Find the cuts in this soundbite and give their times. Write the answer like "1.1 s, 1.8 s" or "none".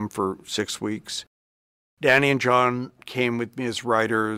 none